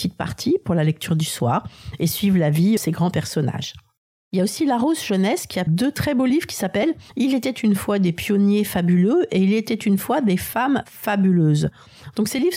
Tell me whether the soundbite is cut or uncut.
cut